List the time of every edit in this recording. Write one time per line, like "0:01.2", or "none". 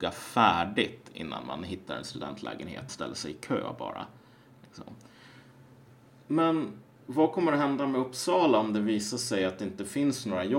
0:02.9